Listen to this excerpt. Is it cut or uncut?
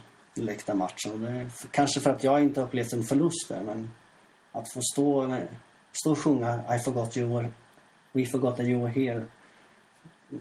uncut